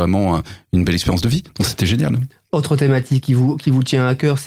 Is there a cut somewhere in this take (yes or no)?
no